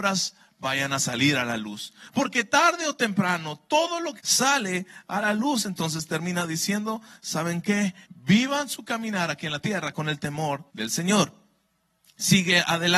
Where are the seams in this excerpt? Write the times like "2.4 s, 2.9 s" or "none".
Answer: 4.2 s, 8.0 s, 10.7 s

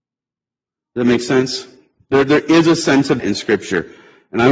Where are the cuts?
3.2 s

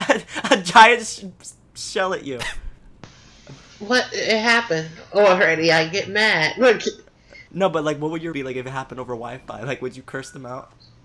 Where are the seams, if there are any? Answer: 7.5 s, 8.3 s

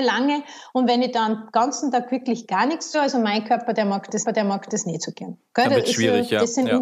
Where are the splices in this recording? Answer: 2.9 s, 4.3 s

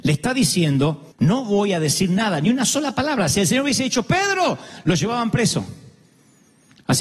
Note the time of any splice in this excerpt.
1.1 s

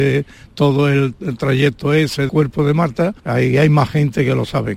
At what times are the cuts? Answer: 2.3 s, 3.2 s

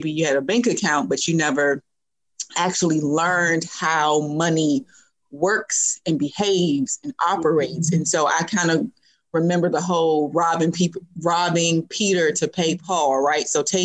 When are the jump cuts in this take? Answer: none

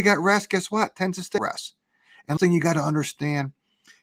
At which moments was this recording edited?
1.4 s, 2.4 s

